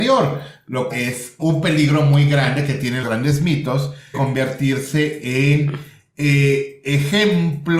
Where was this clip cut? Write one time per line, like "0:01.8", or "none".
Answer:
0:00.9
0:01.4
0:03.0
0:04.1

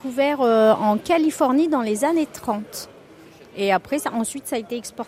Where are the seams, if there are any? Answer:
none

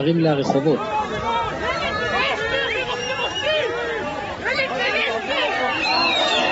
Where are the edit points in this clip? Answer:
none

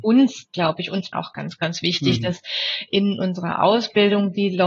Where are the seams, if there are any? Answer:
0:01.1

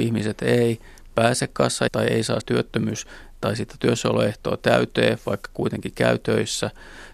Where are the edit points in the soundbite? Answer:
0:01.9
0:02.4

